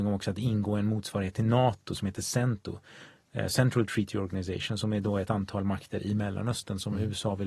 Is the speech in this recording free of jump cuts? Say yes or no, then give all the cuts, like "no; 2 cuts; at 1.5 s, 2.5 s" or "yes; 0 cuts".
yes; 0 cuts